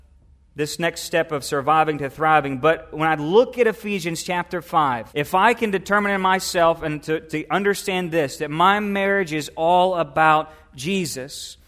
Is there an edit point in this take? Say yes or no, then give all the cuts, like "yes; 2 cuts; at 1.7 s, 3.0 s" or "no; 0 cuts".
yes; 1 cut; at 5.1 s